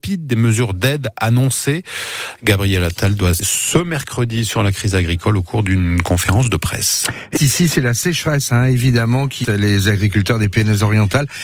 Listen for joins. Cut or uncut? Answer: cut